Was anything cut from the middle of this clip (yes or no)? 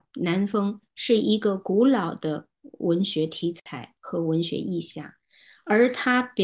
no